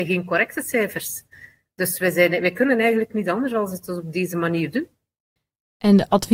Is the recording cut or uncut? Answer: uncut